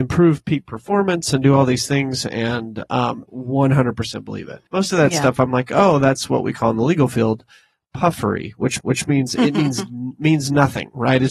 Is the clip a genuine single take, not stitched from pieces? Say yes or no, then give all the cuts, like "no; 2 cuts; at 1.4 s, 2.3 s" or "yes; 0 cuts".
no; 3 cuts; at 3.3 s, 4.7 s, 8.8 s